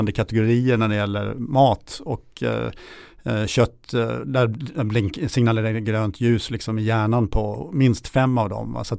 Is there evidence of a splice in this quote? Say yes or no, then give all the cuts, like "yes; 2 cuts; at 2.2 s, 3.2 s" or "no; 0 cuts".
no; 0 cuts